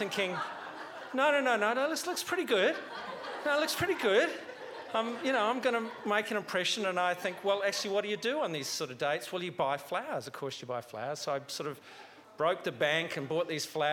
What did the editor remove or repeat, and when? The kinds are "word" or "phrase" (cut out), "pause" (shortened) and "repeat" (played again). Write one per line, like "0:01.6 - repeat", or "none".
none